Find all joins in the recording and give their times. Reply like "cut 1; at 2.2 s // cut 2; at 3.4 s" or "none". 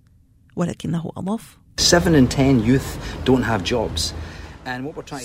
none

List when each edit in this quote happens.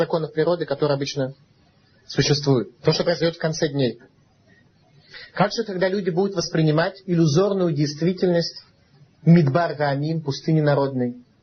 cut 1; at 2.8 s

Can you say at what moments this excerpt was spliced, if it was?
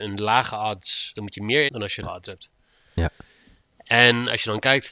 cut 1; at 1.1 s // cut 2; at 1.7 s // cut 3; at 2.0 s

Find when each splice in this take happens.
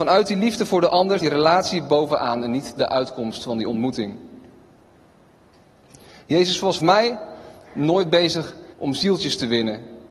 cut 1; at 1.2 s // cut 2; at 6.8 s // cut 3; at 8.7 s

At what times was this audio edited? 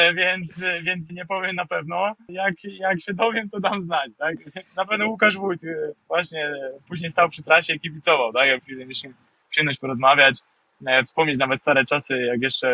cut 1; at 1.1 s // cut 2; at 4.7 s // cut 3; at 6.0 s // cut 4; at 8.6 s

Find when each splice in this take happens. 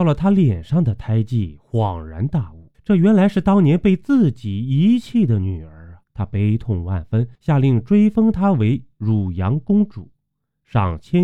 cut 1; at 2.7 s // cut 2; at 6.0 s // cut 3; at 7.3 s

